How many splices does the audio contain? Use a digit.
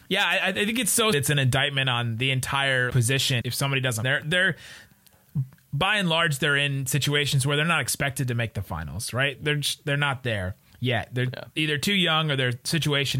7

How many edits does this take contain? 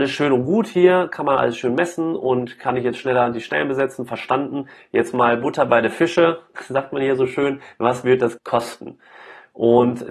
1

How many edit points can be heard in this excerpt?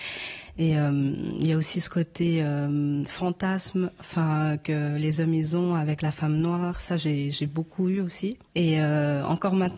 1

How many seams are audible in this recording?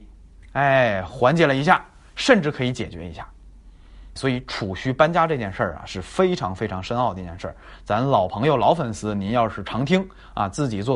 1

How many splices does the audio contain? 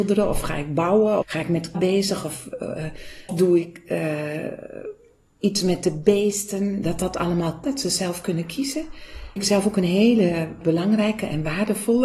6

